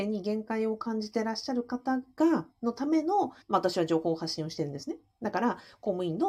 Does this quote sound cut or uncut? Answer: cut